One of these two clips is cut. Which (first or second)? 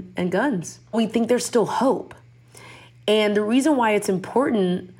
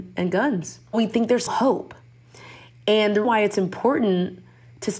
second